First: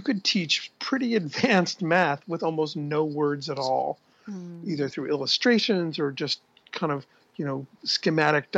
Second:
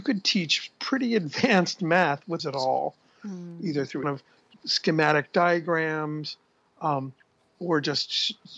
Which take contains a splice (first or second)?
second